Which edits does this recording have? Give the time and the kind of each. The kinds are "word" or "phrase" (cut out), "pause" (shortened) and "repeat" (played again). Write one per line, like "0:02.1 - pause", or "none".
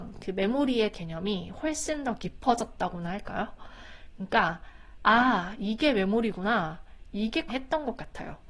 0:00.9 - word
0:07.5 - word